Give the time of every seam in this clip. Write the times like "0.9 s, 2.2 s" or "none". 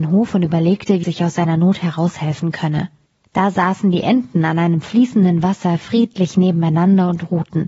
1.0 s, 3.1 s